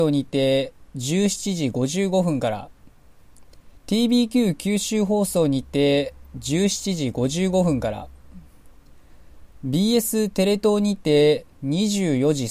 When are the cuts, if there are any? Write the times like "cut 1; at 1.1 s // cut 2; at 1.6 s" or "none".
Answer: cut 1; at 3.8 s